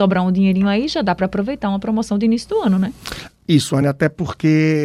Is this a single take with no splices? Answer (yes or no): yes